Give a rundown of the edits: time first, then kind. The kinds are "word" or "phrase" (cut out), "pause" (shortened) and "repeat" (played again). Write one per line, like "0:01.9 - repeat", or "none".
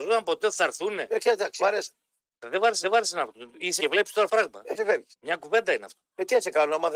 0:01.6 - word
0:02.2 - pause
0:02.8 - repeat
0:03.8 - word
0:04.3 - word
0:04.8 - word
0:05.1 - pause